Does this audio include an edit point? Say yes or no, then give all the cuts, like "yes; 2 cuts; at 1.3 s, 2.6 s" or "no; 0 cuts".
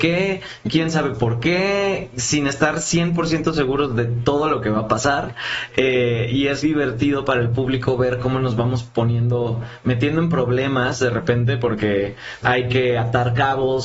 yes; 2 cuts; at 6.6 s, 12.4 s